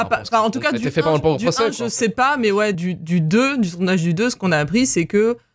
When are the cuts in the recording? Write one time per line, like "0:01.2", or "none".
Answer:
0:02.7